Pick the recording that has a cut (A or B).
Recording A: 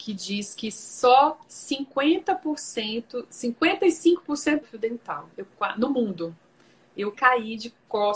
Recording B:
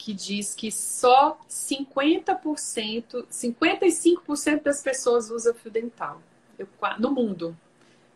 A